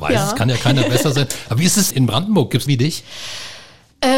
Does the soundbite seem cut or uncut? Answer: cut